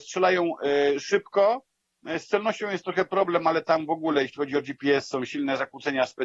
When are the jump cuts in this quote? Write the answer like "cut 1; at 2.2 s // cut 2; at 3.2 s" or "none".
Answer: none